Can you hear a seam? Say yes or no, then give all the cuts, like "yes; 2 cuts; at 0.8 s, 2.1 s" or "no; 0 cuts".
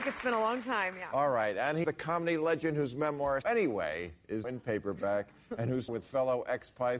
yes; 4 cuts; at 1.8 s, 3.4 s, 4.4 s, 5.9 s